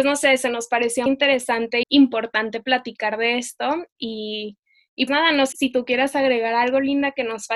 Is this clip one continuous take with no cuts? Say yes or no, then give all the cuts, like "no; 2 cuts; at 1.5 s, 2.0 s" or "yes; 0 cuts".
no; 4 cuts; at 1.1 s, 1.8 s, 5.1 s, 5.5 s